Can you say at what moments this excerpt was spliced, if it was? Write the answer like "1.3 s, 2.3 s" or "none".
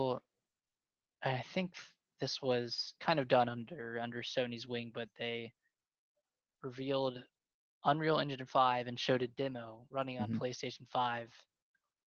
none